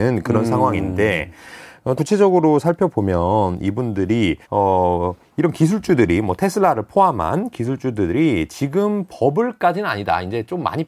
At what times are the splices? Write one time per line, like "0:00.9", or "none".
0:02.0
0:04.4